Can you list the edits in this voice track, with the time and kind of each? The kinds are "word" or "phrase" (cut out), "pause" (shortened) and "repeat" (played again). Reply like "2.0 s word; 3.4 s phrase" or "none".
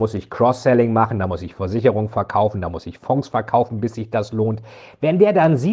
none